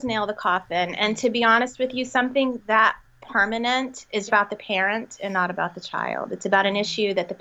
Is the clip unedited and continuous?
no; 1 cut; at 4.3 s

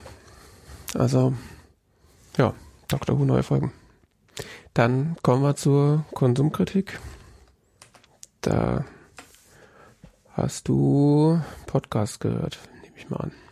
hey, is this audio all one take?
yes; 0 cuts

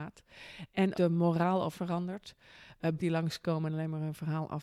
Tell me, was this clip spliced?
yes; 3 cuts; at 0.9 s, 1.7 s, 3.0 s

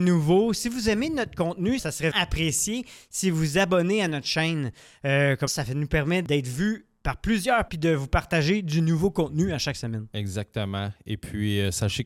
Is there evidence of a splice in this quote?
yes; 4 cuts; at 1.8 s, 2.1 s, 5.5 s, 7.7 s

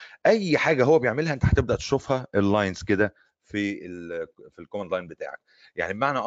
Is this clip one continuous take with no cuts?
yes; 0 cuts

